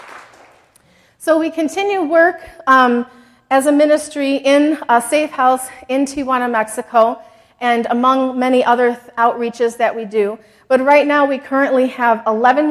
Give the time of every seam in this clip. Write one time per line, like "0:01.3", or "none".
none